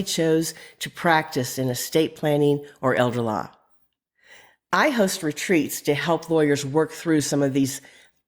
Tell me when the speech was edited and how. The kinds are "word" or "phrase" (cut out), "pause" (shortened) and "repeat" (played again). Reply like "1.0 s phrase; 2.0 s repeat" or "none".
none